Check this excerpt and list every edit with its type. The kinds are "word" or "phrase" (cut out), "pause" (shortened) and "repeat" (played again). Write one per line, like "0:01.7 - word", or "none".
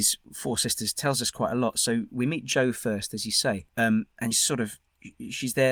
0:03.7 - pause
0:04.3 - word